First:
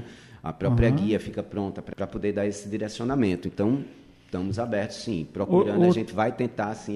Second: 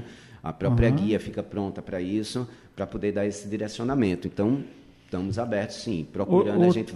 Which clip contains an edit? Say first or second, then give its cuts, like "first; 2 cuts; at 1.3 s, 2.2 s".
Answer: first; 1 cut; at 1.9 s